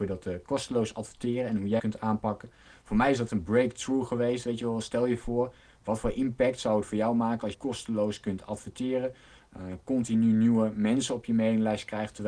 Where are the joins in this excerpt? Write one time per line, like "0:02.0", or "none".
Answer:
0:01.8
0:03.3
0:07.5